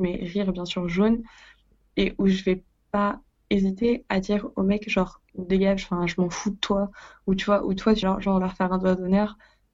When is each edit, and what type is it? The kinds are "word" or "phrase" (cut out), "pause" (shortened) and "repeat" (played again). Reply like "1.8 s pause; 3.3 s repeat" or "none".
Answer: 5.3 s word; 8.0 s word